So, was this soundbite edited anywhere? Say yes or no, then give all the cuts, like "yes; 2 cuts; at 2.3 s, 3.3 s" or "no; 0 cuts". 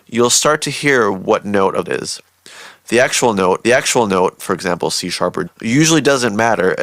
yes; 3 cuts; at 1.9 s, 3.6 s, 5.5 s